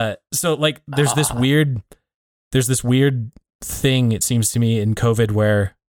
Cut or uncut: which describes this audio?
uncut